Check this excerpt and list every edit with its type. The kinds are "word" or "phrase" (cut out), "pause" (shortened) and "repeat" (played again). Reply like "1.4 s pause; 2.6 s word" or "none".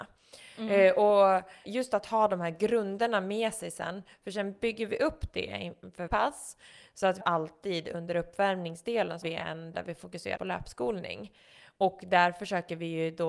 1.6 s word; 6.1 s word; 7.2 s word; 9.2 s word; 9.7 s word; 10.4 s word